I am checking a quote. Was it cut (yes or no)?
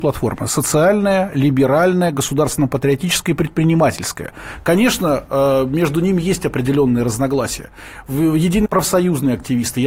yes